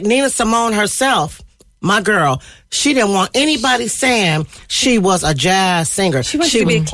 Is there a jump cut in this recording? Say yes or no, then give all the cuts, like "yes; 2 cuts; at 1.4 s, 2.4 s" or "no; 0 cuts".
no; 0 cuts